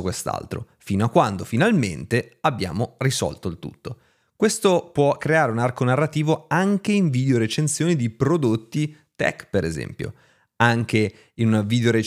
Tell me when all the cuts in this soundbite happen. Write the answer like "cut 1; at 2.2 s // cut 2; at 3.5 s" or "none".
none